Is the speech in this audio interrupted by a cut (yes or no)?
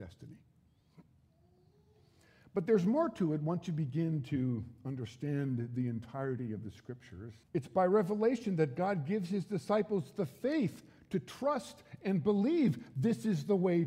yes